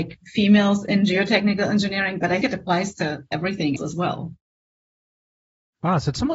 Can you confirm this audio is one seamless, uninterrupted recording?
no; 2 cuts; at 2.4 s, 3.8 s

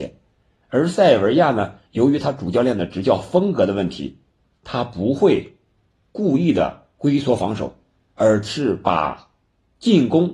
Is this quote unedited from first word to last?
no; 1 cut; at 1.9 s

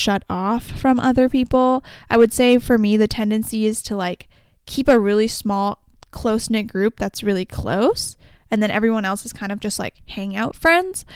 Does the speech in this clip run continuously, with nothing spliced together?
yes; 0 cuts

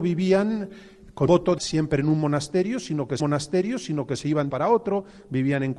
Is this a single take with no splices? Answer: no; 4 cuts; at 1.3 s, 1.6 s, 3.2 s, 4.5 s

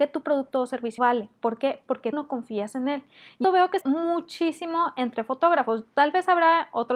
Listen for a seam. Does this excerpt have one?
yes; 4 cuts; at 1.0 s, 2.1 s, 3.4 s, 3.8 s

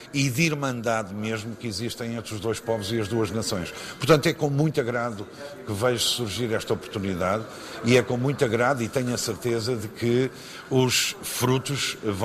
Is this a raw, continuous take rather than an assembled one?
yes; 0 cuts

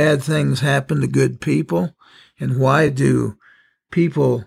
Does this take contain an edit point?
no; 0 cuts

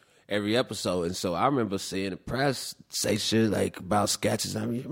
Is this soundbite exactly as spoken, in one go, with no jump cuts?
yes; 0 cuts

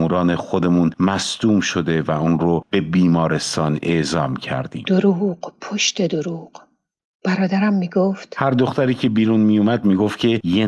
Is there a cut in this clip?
no; 0 cuts

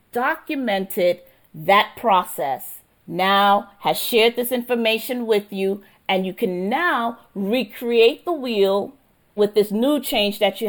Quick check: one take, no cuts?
yes; 0 cuts

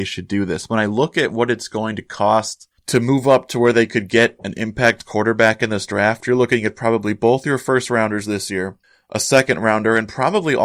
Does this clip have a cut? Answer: yes; 1 cut; at 8.8 s

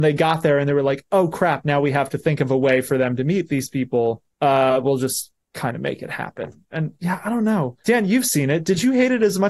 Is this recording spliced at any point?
yes; 3 cuts; at 4.3 s, 5.4 s, 7.8 s

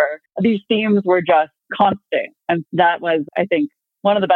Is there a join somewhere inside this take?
yes; 1 cut; at 2.7 s

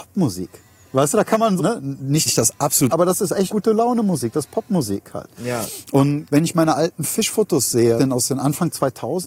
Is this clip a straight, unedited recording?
no; 6 cuts; at 1.6 s, 2.3 s, 2.9 s, 3.5 s, 6.3 s, 8.0 s

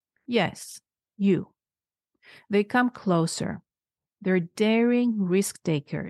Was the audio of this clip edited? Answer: no; 0 cuts

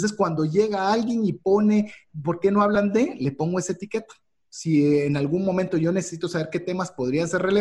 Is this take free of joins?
yes; 0 cuts

